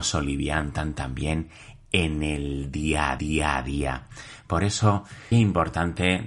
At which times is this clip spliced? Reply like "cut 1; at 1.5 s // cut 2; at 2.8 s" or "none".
cut 1; at 3.2 s // cut 2; at 5.3 s